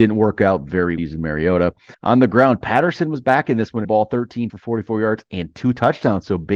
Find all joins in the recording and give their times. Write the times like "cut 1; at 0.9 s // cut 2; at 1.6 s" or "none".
cut 1; at 1.0 s // cut 2; at 1.9 s // cut 3; at 3.8 s // cut 4; at 4.5 s